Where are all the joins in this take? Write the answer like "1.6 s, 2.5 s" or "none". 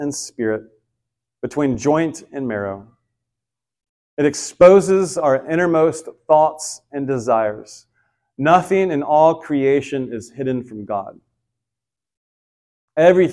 none